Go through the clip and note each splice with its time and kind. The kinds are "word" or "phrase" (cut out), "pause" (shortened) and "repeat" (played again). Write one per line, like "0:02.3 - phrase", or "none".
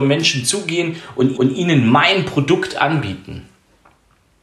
0:01.3 - repeat